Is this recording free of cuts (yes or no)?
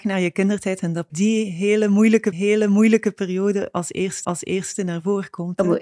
no